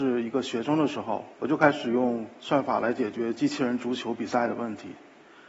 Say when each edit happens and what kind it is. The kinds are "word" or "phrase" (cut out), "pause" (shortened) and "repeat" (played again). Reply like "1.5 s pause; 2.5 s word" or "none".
1.3 s pause